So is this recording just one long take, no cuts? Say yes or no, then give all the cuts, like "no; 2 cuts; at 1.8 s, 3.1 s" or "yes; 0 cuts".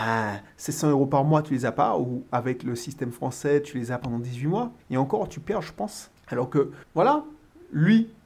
no; 3 cuts; at 4.8 s, 6.2 s, 6.8 s